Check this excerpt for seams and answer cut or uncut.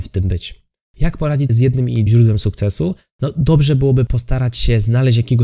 cut